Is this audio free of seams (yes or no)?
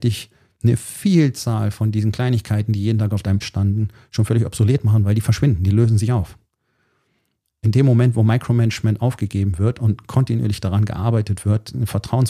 no